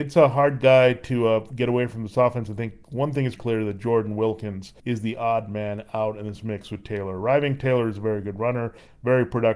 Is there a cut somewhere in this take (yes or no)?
yes